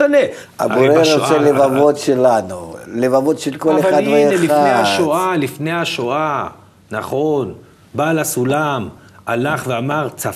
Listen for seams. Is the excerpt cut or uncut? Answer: uncut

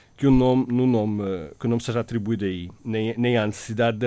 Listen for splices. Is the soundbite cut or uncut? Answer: uncut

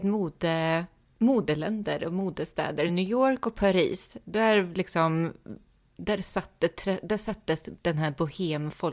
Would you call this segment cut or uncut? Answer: uncut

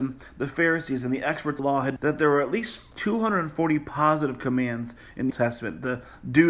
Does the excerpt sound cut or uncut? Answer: cut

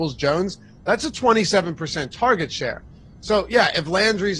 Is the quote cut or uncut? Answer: uncut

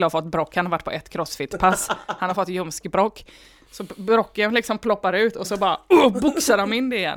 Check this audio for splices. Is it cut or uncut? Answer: uncut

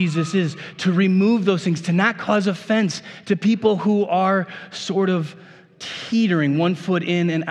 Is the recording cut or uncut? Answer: uncut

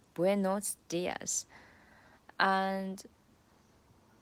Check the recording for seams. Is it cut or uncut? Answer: uncut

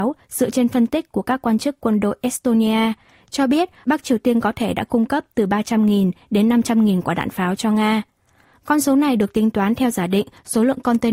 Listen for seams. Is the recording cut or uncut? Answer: uncut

